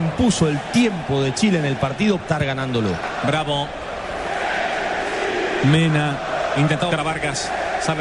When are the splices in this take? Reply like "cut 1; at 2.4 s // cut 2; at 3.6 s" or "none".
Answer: cut 1; at 2.2 s // cut 2; at 6.9 s